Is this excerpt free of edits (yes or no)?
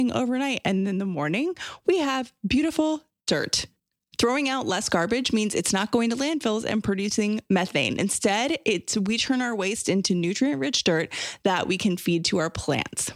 yes